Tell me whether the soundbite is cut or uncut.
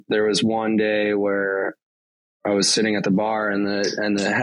uncut